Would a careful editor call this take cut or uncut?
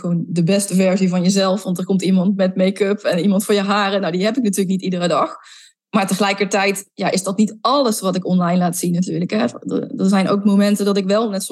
uncut